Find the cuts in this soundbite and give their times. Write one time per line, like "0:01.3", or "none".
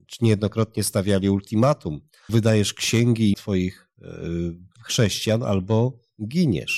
0:02.3
0:03.3
0:04.8